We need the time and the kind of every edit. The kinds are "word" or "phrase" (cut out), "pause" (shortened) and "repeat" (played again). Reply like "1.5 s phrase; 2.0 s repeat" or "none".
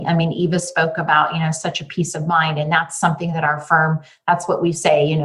none